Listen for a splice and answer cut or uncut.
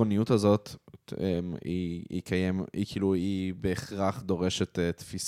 uncut